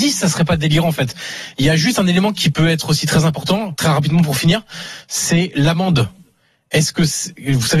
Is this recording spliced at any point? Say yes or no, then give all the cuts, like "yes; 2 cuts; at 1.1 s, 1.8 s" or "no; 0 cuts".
no; 0 cuts